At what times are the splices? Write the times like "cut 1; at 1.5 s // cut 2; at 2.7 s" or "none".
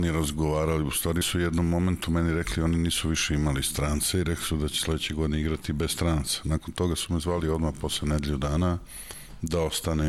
cut 1; at 1.2 s